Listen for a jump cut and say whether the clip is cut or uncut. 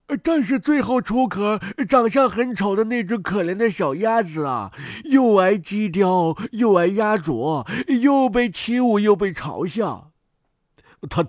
uncut